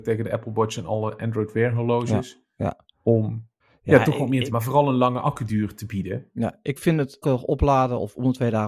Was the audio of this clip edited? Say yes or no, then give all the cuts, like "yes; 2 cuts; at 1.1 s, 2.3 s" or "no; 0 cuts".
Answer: yes; 4 cuts; at 3.6 s, 4.5 s, 6.8 s, 7.2 s